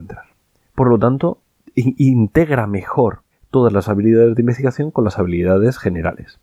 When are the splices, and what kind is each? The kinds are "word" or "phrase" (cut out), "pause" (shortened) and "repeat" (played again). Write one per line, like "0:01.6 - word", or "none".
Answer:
0:01.6 - pause
0:03.3 - pause